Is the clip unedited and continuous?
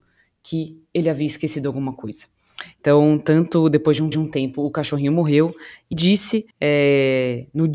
no; 3 cuts; at 4.1 s, 5.9 s, 6.5 s

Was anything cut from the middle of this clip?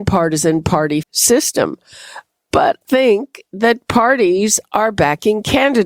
yes; 2 cuts; at 1.0 s, 2.8 s

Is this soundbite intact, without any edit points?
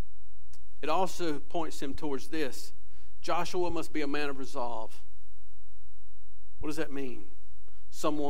yes; 0 cuts

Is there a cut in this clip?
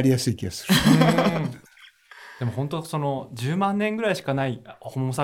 yes; 1 cut; at 1.7 s

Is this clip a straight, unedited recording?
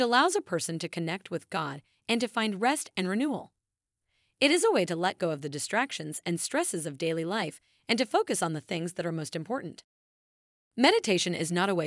yes; 0 cuts

